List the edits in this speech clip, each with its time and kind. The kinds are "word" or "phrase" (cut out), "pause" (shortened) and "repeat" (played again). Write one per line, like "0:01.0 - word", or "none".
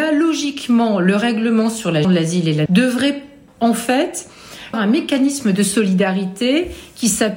0:02.0 - word
0:02.7 - word
0:03.5 - word
0:04.7 - word

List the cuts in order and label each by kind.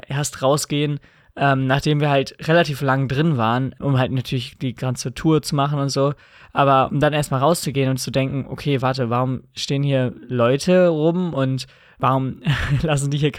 none

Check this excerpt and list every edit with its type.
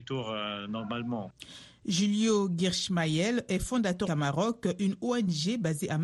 0:04.1 - word

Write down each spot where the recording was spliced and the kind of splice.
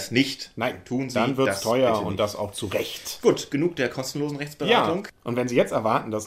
none

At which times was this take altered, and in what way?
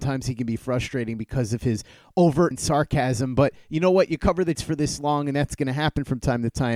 0:02.5 - word
0:04.5 - word

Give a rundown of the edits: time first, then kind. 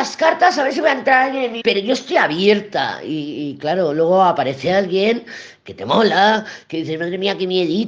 0:01.6 - word

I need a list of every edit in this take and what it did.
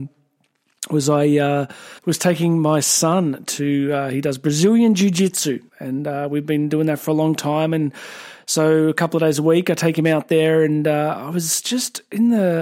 0:02.0 - pause
0:05.7 - pause

